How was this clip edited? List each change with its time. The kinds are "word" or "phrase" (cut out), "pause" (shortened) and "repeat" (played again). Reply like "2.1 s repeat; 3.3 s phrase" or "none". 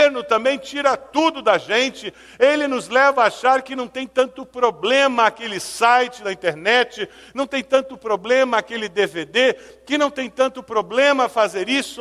none